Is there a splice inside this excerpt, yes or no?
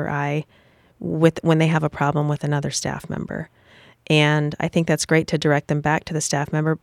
no